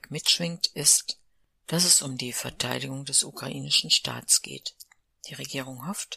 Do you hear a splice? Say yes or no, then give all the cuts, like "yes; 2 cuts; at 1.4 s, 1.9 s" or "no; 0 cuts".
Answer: no; 0 cuts